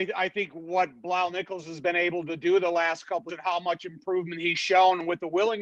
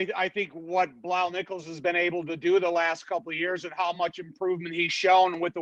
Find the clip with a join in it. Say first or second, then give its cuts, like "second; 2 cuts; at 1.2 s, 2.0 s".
first; 1 cut; at 3.3 s